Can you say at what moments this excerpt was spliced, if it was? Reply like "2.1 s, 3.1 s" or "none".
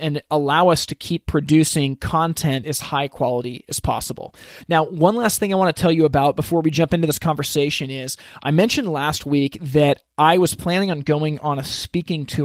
2.6 s